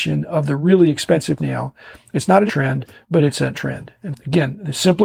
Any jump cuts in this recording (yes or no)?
yes